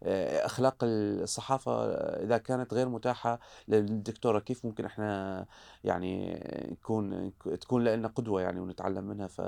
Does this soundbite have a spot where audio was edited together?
no; 0 cuts

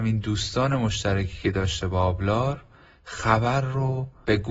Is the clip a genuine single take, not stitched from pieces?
yes; 0 cuts

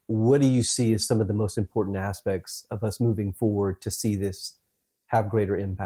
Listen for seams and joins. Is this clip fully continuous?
yes; 0 cuts

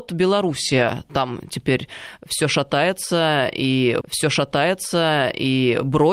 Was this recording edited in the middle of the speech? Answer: yes; 1 cut; at 4.0 s

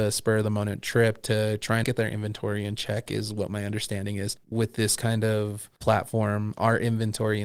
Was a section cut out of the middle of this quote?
yes; 1 cut; at 1.8 s

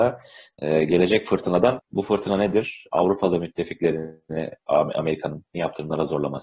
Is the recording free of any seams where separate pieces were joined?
no; 2 cuts; at 1.8 s, 5.5 s

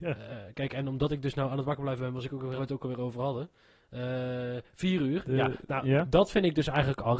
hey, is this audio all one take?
no; 1 cut; at 2.6 s

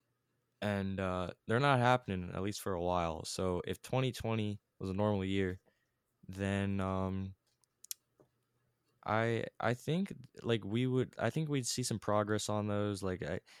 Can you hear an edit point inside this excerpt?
no; 0 cuts

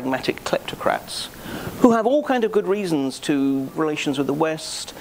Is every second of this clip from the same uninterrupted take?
no; 1 cut; at 3.7 s

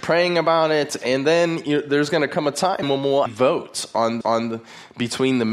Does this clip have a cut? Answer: yes; 3 cuts; at 2.8 s, 3.3 s, 4.2 s

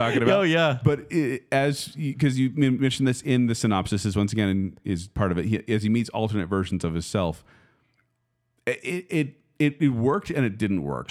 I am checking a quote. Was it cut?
no; 0 cuts

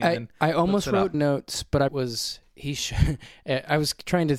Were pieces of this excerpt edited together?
yes; 2 cuts; at 1.1 s, 1.9 s

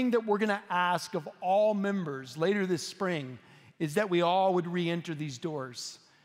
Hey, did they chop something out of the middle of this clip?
no; 0 cuts

